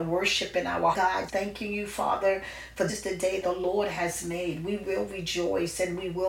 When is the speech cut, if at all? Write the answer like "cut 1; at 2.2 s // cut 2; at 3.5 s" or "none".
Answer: cut 1; at 0.9 s // cut 2; at 1.3 s // cut 3; at 2.9 s // cut 4; at 3.4 s